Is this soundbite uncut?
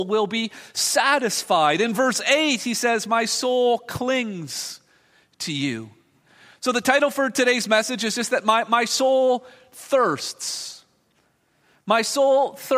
yes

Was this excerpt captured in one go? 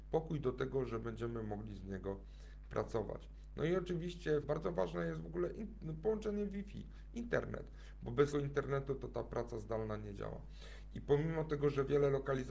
no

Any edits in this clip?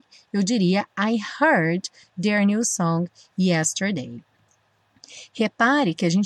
no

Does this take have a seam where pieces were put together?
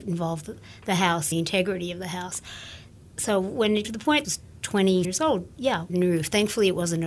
yes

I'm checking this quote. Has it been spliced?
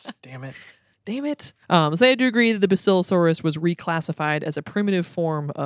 yes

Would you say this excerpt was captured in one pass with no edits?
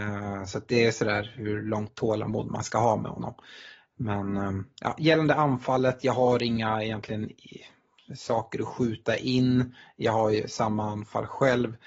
yes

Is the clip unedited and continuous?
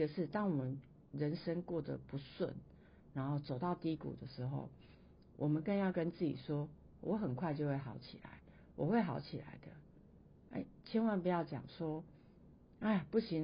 yes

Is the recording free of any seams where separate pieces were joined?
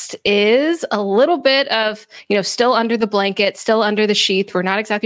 yes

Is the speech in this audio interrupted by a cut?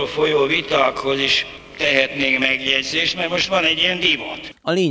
no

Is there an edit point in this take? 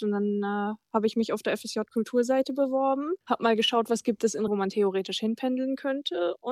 yes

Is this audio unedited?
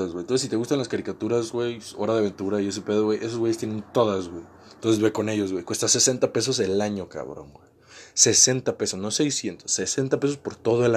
yes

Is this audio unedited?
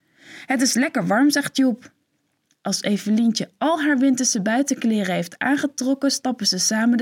yes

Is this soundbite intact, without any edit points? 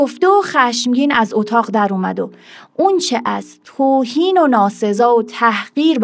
yes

